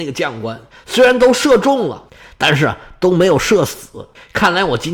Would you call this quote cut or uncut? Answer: uncut